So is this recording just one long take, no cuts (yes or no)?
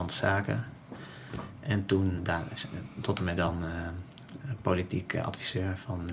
no